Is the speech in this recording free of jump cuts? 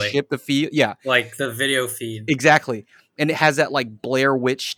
yes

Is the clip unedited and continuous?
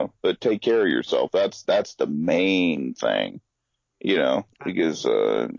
yes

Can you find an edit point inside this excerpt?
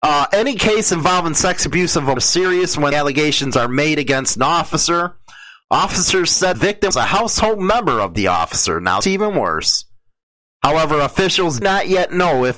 yes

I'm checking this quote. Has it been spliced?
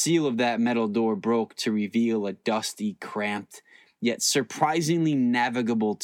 no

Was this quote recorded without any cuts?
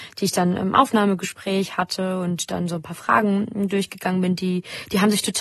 yes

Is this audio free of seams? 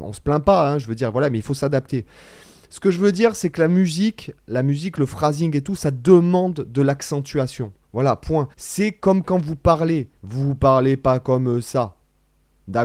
no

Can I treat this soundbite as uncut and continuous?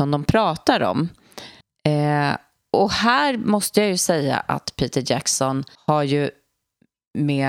no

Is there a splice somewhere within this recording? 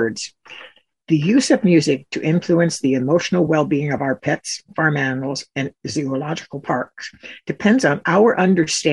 no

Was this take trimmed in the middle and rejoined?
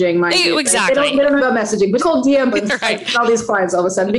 yes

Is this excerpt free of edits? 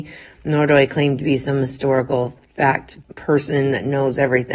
no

